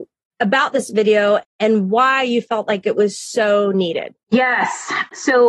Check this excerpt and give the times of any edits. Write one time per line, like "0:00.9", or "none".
0:04.2